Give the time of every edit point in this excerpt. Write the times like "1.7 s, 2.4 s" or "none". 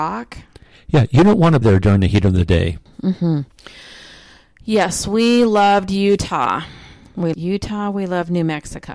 1.6 s, 7.3 s